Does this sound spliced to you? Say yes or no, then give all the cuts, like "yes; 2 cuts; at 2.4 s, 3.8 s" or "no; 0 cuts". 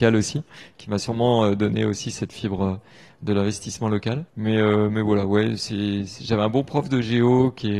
yes; 1 cut; at 4.3 s